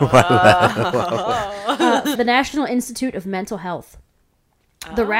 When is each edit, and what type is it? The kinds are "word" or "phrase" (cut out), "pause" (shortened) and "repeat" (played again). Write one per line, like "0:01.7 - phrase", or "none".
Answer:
0:02.1 - word